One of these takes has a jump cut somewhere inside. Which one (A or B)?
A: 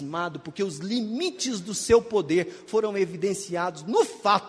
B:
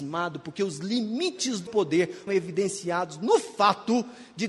B